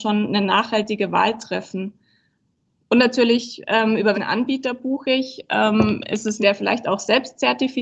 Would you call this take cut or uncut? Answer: cut